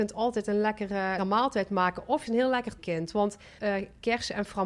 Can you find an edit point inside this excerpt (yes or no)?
yes